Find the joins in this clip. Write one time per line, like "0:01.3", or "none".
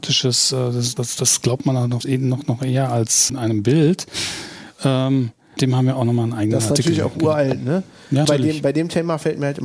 0:01.0
0:02.0
0:03.3
0:05.6
0:08.2